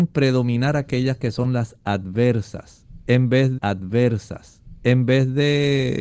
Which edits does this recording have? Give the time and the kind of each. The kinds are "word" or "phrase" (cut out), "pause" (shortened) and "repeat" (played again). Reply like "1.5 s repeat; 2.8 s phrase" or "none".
3.6 s repeat